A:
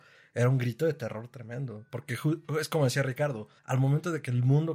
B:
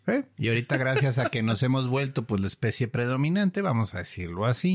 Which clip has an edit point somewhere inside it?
A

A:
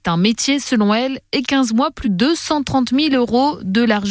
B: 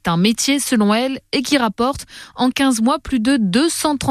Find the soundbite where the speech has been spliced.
A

